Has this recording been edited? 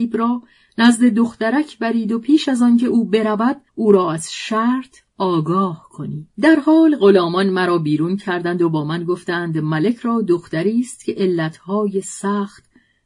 yes; 2 cuts; at 3.7 s, 6.3 s

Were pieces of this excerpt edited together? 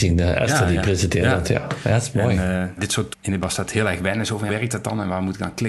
yes; 4 cuts; at 2.8 s, 3.1 s, 3.4 s, 4.5 s

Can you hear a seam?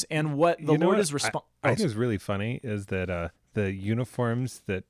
yes; 2 cuts; at 1.8 s, 3.4 s

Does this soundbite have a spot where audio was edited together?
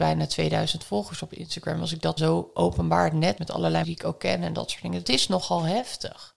yes; 4 cuts; at 2.2 s, 3.4 s, 3.8 s, 5.0 s

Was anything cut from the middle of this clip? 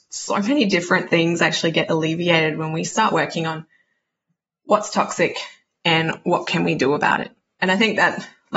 no; 0 cuts

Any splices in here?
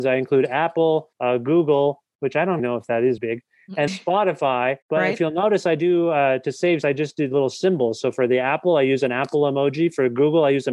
yes; 6 cuts; at 1.1 s, 2.6 s, 3.2 s, 3.9 s, 4.8 s, 6.8 s

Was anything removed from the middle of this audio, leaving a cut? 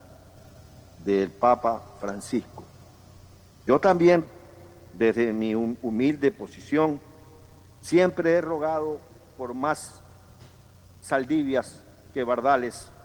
no; 0 cuts

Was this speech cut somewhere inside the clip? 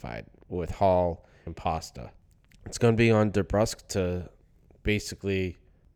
yes; 1 cut; at 1.5 s

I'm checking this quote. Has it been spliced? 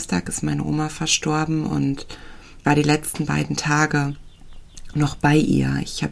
yes; 1 cut; at 2.6 s

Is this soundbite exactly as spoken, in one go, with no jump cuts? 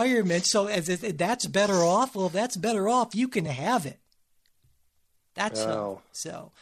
yes; 0 cuts

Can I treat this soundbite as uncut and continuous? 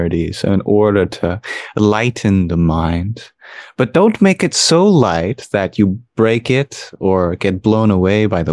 yes; 0 cuts

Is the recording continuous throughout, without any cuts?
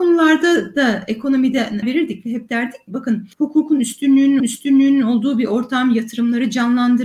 no; 4 cuts; at 1.8 s, 2.9 s, 3.3 s, 4.4 s

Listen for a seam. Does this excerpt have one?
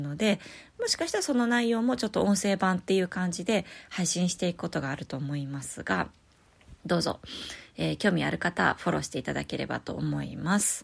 yes; 1 cut; at 6.8 s

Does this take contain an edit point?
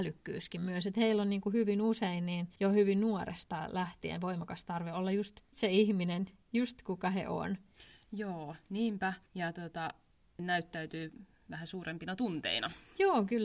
yes; 4 cuts; at 2.6 s, 5.5 s, 9.3 s, 10.4 s

